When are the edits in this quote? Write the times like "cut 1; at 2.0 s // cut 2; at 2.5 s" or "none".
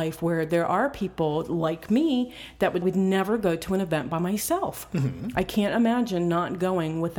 cut 1; at 2.8 s